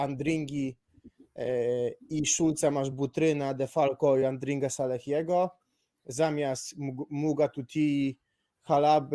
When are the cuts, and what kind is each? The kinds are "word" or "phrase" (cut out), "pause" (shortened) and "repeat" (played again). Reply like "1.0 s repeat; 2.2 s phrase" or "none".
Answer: none